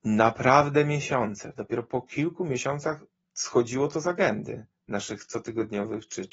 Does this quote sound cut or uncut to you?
uncut